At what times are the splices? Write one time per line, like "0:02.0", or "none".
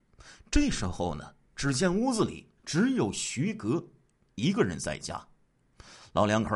0:01.4
0:02.6